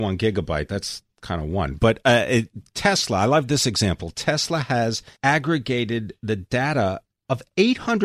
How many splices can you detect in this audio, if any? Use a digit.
2